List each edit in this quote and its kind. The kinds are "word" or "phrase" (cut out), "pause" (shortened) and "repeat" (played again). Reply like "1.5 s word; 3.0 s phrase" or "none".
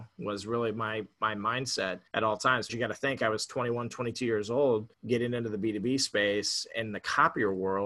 2.1 s pause; 2.7 s word; 4.9 s pause